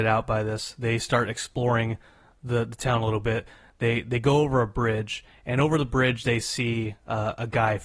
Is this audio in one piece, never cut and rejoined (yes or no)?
yes